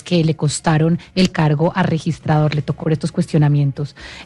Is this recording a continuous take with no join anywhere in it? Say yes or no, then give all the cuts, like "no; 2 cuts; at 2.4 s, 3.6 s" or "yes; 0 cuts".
no; 1 cut; at 2.8 s